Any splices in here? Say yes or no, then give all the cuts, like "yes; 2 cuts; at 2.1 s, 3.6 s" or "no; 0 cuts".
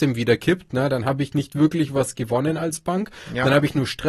no; 0 cuts